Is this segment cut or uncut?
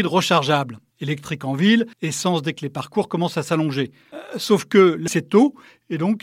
cut